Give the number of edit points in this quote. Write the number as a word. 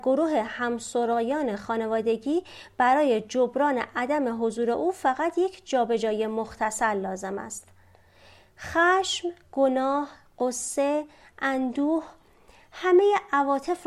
zero